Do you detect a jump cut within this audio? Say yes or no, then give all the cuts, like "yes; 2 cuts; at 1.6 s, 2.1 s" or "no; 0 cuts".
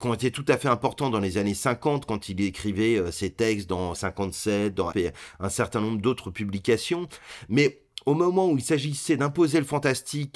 yes; 2 cuts; at 3.9 s, 4.9 s